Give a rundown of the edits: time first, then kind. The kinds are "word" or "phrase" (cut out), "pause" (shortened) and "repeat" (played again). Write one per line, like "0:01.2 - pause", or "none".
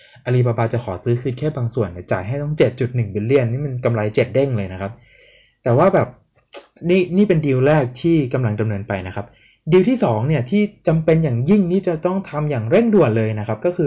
none